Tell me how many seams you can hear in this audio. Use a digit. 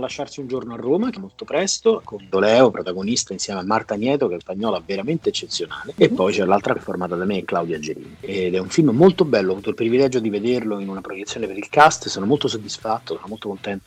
4